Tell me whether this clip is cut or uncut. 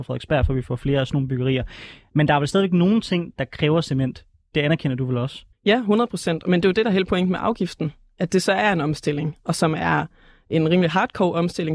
cut